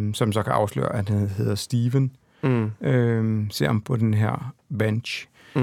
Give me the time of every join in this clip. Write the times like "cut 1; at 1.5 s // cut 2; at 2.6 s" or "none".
none